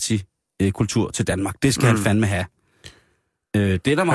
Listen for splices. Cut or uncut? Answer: uncut